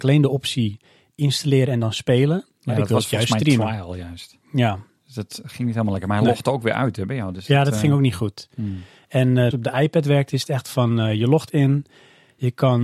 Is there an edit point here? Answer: yes; 1 cut; at 9.5 s

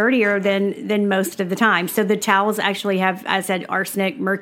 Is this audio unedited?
no; 1 cut; at 3.4 s

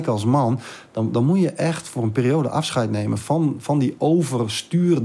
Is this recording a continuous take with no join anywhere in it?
no; 1 cut; at 3.2 s

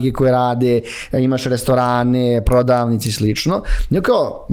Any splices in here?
no; 0 cuts

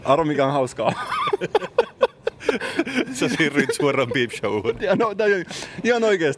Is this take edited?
no; 0 cuts

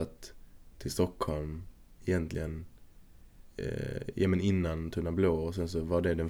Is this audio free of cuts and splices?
yes; 0 cuts

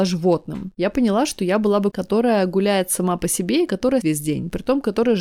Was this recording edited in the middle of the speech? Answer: yes; 2 cuts; at 1.9 s, 4.0 s

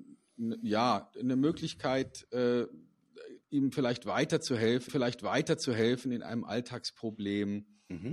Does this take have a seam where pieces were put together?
yes; 2 cuts; at 3.4 s, 4.9 s

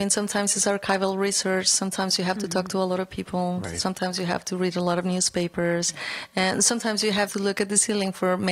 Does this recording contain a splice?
yes; 1 cut; at 7.3 s

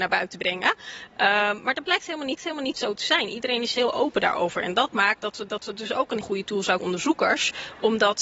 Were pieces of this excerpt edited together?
yes; 5 cuts; at 2.4 s, 3.7 s, 5.5 s, 6.2 s, 6.8 s

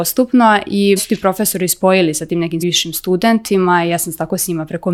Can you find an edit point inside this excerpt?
yes; 2 cuts; at 1.0 s, 2.6 s

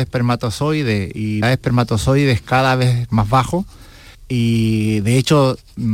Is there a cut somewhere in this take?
yes; 2 cuts; at 1.4 s, 4.1 s

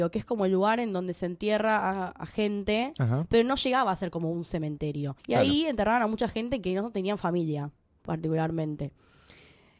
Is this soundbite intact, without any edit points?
no; 1 cut; at 5.2 s

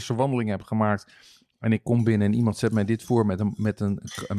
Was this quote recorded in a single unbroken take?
yes; 0 cuts

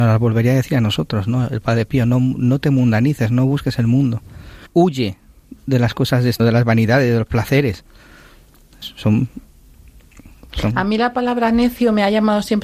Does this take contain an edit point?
yes; 3 cuts; at 4.7 s, 6.4 s, 8.8 s

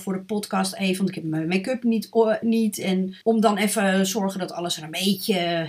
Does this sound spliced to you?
yes; 2 cuts; at 2.4 s, 3.2 s

